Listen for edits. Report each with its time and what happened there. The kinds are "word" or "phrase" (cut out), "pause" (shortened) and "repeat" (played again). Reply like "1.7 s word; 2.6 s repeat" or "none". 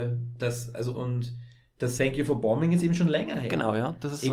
0.9 s word; 2.0 s word